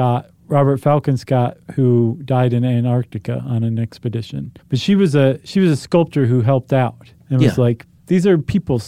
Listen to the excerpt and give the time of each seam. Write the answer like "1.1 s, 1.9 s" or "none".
1.6 s, 4.6 s, 7.2 s